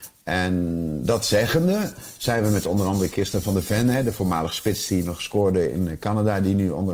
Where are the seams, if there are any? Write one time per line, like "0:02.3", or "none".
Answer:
none